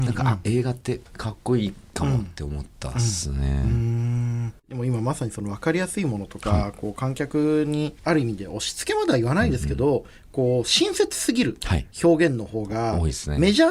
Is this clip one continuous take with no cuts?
no; 4 cuts; at 1.1 s, 4.6 s, 8.0 s, 11.9 s

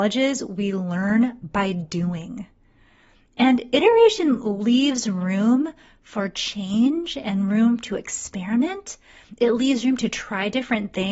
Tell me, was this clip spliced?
no; 0 cuts

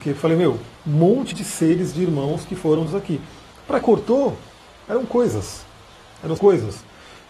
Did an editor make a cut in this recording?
yes; 4 cuts; at 1.3 s, 2.9 s, 3.8 s, 6.4 s

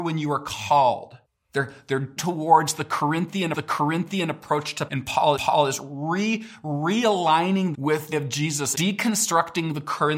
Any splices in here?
yes; 8 cuts; at 1.3 s, 2.2 s, 3.5 s, 4.9 s, 5.4 s, 7.7 s, 8.1 s, 8.7 s

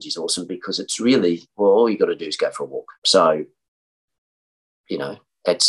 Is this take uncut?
no; 1 cut; at 2.9 s

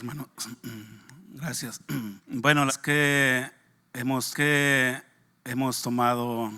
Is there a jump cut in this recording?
yes; 3 cuts; at 2.2 s, 2.7 s, 4.3 s

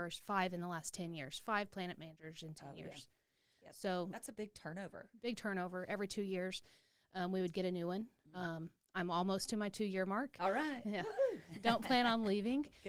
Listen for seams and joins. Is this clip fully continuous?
yes; 0 cuts

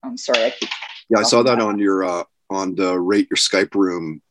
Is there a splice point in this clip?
no; 0 cuts

